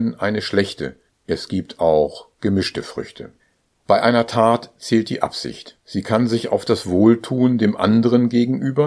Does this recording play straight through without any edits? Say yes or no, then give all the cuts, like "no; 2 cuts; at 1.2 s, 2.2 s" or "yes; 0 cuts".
no; 3 cuts; at 1.1 s, 3.4 s, 5.8 s